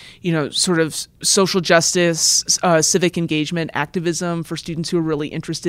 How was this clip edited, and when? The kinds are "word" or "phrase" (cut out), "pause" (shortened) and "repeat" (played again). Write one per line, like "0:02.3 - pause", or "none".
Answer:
0:01.1 - pause